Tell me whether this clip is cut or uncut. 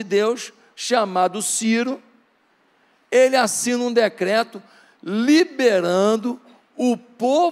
uncut